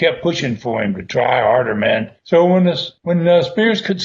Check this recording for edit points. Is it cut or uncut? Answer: cut